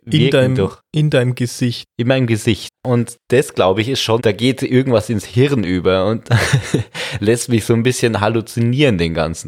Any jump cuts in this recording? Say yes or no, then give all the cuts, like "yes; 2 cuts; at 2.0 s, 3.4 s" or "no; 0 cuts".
yes; 1 cut; at 4.2 s